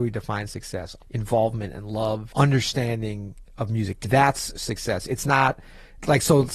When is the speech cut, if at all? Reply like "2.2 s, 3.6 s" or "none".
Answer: 1.0 s, 2.3 s, 4.0 s